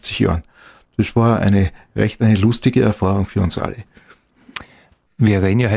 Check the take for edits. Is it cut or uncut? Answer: uncut